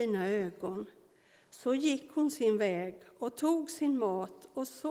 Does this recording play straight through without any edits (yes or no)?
yes